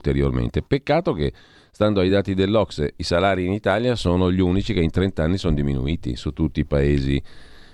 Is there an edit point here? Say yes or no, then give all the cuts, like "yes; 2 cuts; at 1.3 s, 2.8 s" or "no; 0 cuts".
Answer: no; 0 cuts